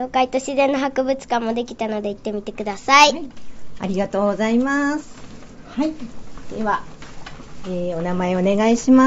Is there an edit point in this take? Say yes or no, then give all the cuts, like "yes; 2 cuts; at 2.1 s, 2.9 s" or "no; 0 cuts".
no; 0 cuts